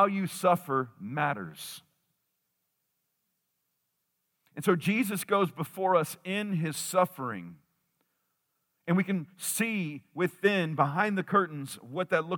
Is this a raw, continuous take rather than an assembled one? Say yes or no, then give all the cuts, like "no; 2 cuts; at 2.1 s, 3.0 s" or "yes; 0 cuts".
yes; 0 cuts